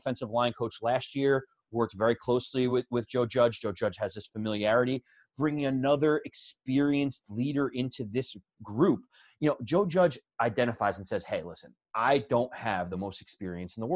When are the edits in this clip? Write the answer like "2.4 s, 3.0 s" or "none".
none